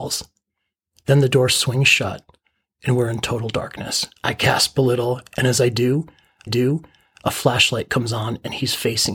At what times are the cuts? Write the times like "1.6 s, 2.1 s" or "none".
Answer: 4.2 s, 6.5 s